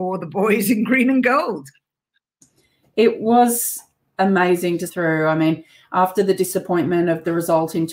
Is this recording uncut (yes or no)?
no